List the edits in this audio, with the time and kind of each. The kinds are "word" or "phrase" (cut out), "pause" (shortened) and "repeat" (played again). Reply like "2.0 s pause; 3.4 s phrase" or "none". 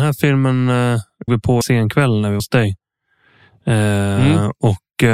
1.3 s word; 1.6 s word; 2.4 s word